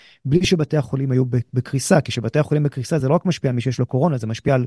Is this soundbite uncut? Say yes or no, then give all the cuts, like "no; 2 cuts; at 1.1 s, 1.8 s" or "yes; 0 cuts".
yes; 0 cuts